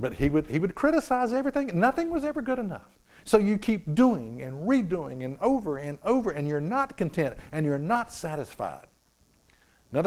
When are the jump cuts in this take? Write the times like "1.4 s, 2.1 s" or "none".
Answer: 3.0 s

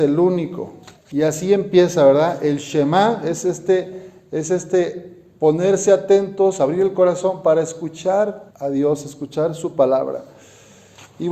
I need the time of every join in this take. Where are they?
1.0 s, 8.5 s

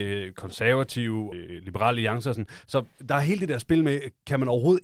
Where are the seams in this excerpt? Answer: 1.3 s

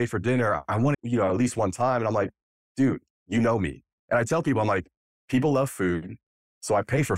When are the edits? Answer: 0.9 s

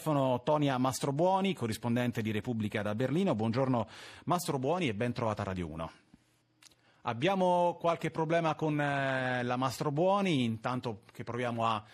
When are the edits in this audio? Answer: none

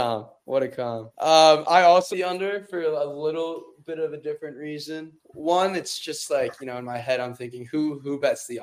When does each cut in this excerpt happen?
1.1 s, 2.1 s, 5.2 s

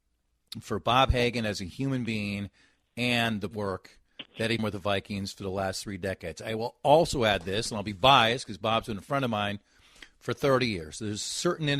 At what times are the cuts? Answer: 3.5 s, 4.3 s, 4.6 s

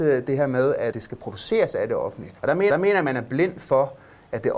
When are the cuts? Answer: 0.9 s, 2.4 s, 2.7 s

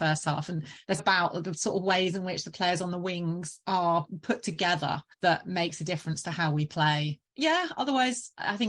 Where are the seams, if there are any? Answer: 1.0 s, 5.1 s, 7.3 s

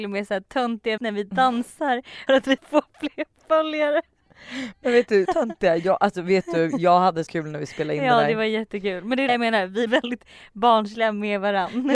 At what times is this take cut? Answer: 1.0 s, 2.3 s, 2.6 s, 5.2 s, 7.3 s, 9.3 s, 9.9 s

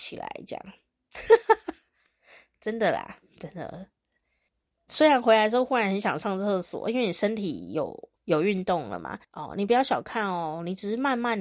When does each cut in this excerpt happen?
4.5 s, 8.2 s, 9.2 s

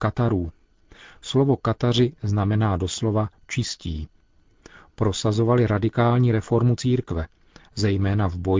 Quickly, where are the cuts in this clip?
none

